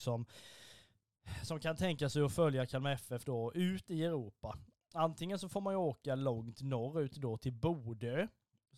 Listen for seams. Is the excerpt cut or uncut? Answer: uncut